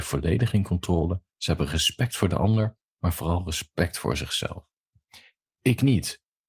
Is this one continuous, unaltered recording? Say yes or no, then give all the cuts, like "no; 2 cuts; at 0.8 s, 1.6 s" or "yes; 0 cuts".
no; 1 cut; at 1.3 s